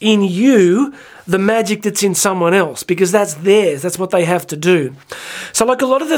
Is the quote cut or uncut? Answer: uncut